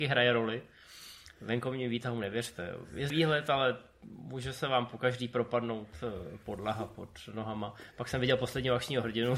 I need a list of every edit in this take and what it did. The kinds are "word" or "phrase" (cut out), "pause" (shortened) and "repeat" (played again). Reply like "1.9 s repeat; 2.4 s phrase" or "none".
3.1 s phrase